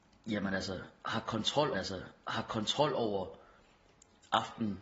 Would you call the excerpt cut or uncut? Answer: cut